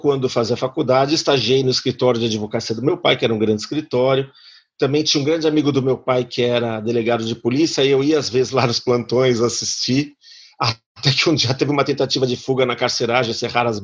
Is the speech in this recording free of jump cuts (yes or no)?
yes